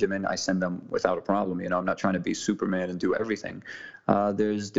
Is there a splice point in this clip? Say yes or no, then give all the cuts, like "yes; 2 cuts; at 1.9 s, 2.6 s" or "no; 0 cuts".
no; 0 cuts